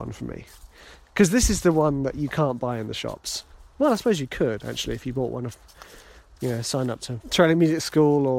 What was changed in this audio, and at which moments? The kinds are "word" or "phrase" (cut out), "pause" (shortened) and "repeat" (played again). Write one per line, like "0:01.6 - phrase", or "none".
none